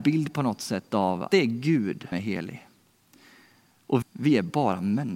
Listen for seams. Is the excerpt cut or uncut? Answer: cut